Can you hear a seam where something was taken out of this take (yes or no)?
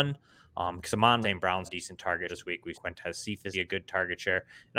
yes